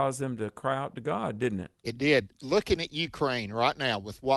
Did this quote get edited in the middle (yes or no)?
no